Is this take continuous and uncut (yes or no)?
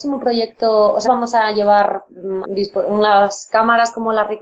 no